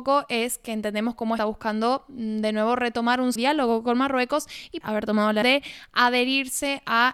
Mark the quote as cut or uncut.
cut